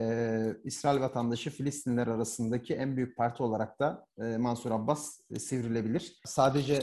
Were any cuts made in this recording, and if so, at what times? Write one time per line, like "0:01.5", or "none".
none